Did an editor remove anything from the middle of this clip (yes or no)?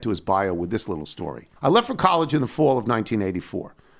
yes